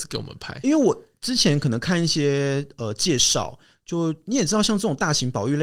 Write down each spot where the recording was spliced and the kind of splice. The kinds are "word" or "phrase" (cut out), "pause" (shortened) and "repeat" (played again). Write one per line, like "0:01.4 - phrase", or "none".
none

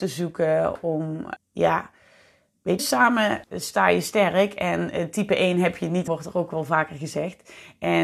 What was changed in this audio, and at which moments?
0:01.4 - word
0:02.8 - word
0:03.4 - word
0:06.1 - word

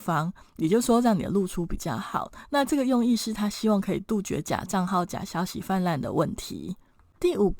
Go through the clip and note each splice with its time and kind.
none

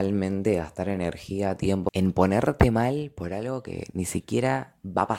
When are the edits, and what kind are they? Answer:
none

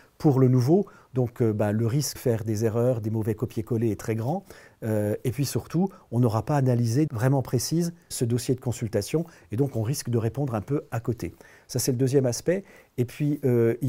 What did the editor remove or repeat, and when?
0:02.1 - word
0:07.1 - phrase
0:08.1 - word

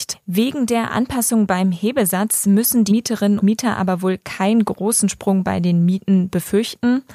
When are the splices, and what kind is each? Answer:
0:02.9 - word
0:03.4 - word

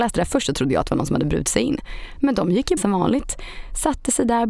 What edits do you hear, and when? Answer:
0:02.8 - phrase

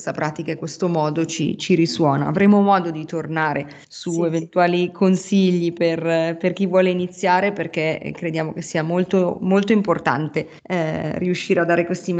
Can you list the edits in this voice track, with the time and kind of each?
0:03.8 - pause
0:10.6 - pause

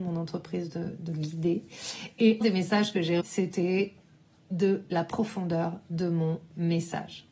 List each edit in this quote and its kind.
0:01.1 - word
0:02.4 - word
0:03.2 - word
0:04.9 - word

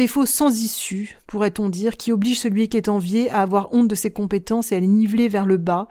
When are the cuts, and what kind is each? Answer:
none

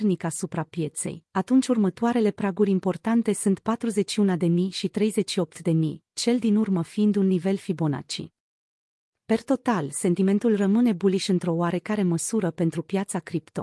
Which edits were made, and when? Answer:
none

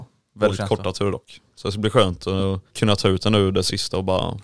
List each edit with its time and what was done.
0:02.7 - pause

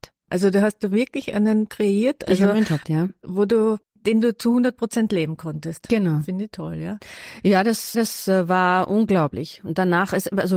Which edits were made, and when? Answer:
0:01.7 - word
0:02.8 - word
0:03.8 - pause
0:07.9 - repeat

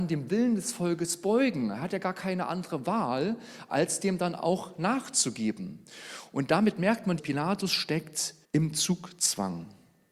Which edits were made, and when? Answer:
0:07.2 - word
0:08.4 - pause

